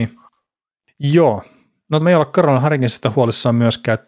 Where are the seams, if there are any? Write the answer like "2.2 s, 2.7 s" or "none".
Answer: 2.0 s